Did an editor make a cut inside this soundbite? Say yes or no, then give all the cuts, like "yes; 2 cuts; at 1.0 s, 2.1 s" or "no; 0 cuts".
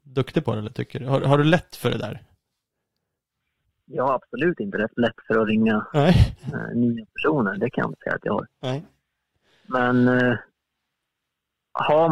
no; 0 cuts